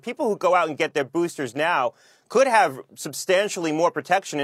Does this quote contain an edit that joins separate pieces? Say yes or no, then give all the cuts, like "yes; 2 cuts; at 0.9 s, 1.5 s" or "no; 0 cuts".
no; 0 cuts